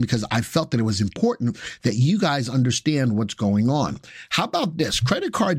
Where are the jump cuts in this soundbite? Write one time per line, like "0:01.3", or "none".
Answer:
none